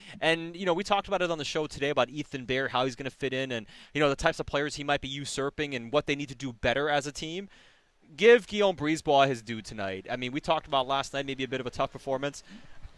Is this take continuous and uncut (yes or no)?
yes